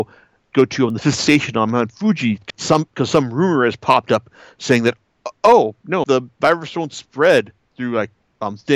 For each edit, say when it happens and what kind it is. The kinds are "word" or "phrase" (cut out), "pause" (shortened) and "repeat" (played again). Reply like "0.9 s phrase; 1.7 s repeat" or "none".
2.5 s word; 6.0 s word